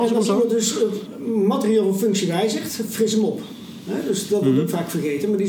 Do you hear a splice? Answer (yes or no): no